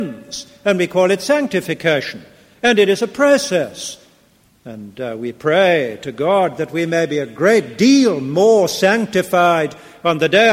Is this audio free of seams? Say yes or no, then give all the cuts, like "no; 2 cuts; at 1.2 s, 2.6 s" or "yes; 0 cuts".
yes; 0 cuts